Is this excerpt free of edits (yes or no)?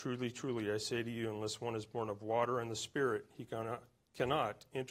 yes